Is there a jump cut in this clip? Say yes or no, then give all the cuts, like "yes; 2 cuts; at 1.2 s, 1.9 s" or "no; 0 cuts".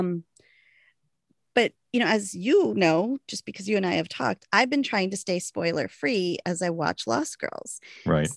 no; 0 cuts